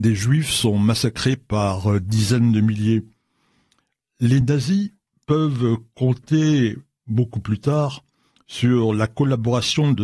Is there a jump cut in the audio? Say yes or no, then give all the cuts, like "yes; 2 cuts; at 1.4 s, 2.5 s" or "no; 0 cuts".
no; 0 cuts